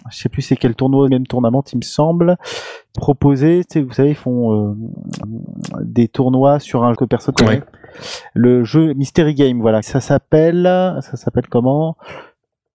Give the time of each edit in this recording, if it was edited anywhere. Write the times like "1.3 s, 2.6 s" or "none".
1.1 s, 2.9 s, 5.2 s, 6.9 s, 7.3 s, 9.8 s